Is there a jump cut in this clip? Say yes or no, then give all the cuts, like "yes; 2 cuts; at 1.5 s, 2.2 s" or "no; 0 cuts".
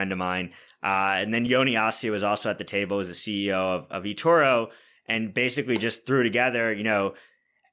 no; 0 cuts